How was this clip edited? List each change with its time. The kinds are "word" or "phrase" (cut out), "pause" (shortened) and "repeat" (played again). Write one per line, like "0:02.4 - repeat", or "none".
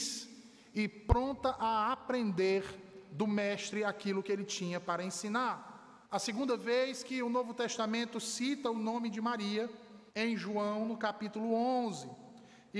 0:06.0 - pause
0:10.1 - pause